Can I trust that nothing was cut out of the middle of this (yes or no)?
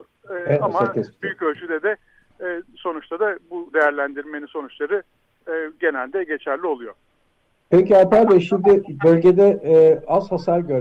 yes